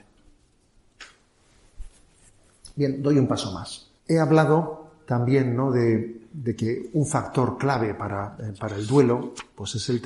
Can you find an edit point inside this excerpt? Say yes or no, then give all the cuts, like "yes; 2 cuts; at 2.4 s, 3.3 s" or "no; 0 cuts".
yes; 1 cut; at 4.0 s